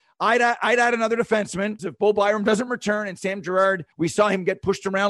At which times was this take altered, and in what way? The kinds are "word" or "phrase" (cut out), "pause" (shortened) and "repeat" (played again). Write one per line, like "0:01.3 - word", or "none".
0:01.8 - word
0:03.9 - pause